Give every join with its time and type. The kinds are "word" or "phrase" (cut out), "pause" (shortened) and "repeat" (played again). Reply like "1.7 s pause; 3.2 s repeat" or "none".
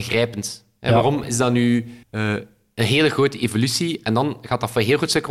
2.0 s pause